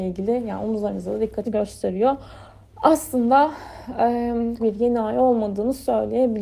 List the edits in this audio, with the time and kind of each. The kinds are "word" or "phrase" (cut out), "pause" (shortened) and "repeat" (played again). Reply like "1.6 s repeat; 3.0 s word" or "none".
1.4 s word; 4.6 s word